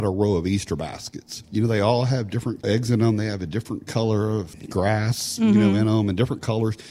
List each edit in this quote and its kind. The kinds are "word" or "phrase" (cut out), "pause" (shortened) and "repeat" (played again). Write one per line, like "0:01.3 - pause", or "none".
none